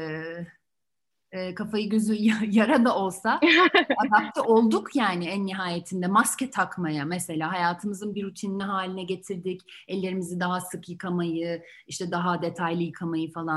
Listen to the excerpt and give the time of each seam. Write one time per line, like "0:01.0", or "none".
none